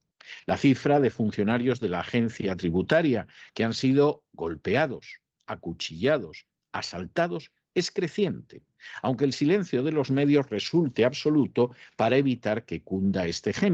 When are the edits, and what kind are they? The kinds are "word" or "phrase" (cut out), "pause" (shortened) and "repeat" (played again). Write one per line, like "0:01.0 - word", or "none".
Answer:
none